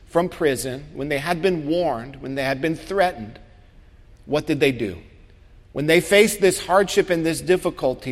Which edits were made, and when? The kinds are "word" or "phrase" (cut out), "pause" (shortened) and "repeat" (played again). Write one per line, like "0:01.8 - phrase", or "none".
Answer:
none